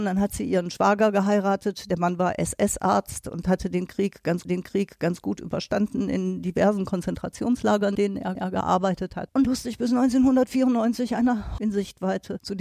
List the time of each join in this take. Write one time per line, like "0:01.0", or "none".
0:04.4
0:07.9
0:08.3
0:09.4
0:11.6